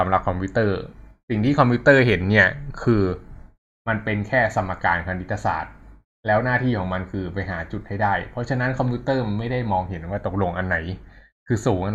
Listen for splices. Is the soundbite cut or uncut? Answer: uncut